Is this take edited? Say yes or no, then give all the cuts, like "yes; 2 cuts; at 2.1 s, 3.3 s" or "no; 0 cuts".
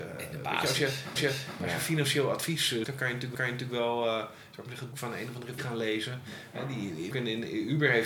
yes; 6 cuts; at 1.2 s, 2.8 s, 3.3 s, 4.9 s, 5.6 s, 7.1 s